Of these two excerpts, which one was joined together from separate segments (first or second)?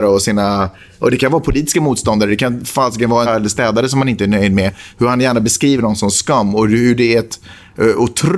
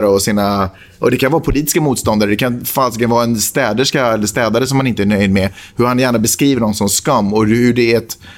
first